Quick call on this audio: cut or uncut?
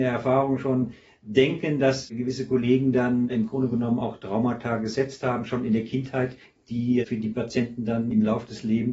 uncut